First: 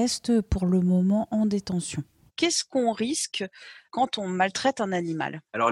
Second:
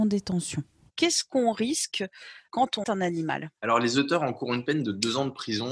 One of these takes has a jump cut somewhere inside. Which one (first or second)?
second